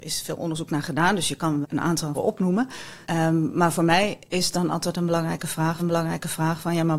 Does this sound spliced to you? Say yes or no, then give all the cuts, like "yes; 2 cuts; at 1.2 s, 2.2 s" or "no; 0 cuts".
yes; 5 cuts; at 1.6 s, 2.1 s, 3.0 s, 4.3 s, 5.8 s